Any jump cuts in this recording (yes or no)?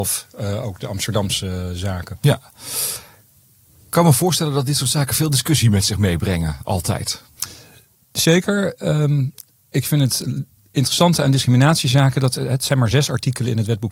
no